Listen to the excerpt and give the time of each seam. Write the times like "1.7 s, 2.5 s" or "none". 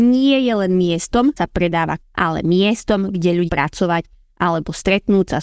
1.4 s, 2.0 s, 3.5 s